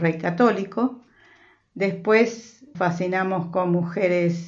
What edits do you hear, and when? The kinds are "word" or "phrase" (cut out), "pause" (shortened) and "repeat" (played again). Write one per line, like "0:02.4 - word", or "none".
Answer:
0:02.7 - word